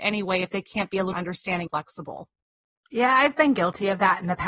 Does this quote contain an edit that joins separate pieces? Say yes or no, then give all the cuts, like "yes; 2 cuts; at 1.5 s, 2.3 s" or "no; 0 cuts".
yes; 2 cuts; at 1.1 s, 1.7 s